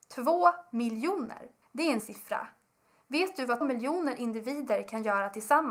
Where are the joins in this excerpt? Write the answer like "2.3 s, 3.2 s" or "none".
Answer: 1.6 s, 2.0 s, 3.6 s